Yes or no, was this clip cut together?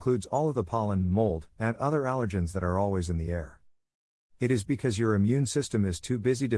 no